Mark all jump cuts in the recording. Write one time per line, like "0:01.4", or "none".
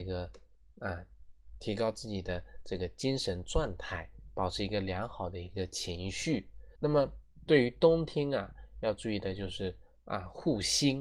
0:06.8